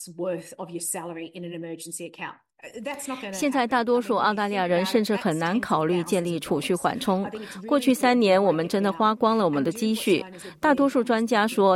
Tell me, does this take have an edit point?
no; 0 cuts

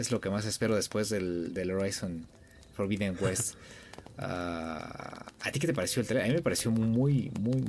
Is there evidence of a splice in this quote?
no; 0 cuts

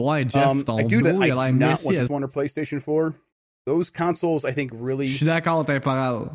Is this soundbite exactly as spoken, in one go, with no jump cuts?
no; 3 cuts; at 1.0 s, 2.1 s, 3.3 s

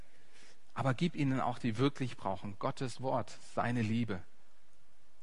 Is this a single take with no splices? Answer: no; 1 cut; at 1.6 s

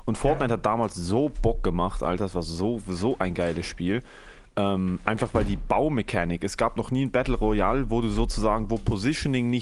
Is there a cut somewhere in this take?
no; 0 cuts

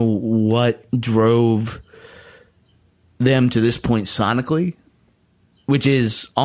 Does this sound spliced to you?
no; 0 cuts

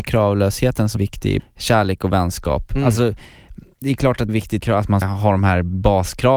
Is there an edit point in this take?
yes; 6 cuts; at 1.0 s, 1.4 s, 3.8 s, 4.3 s, 4.6 s, 5.0 s

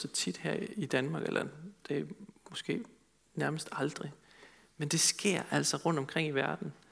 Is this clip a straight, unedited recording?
yes; 0 cuts

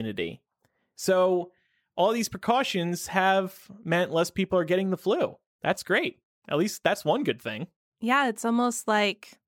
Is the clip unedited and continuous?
yes; 0 cuts

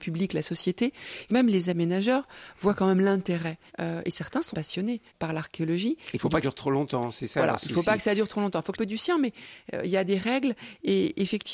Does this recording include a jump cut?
yes; 6 cuts; at 1.3 s, 3.7 s, 4.5 s, 5.1 s, 6.4 s, 8.7 s

